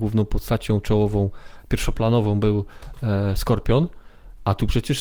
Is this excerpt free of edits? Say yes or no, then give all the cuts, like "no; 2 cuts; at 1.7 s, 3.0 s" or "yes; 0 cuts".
yes; 0 cuts